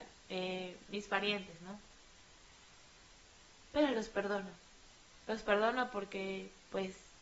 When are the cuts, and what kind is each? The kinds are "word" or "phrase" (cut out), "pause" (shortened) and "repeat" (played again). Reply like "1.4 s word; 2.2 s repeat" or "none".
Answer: none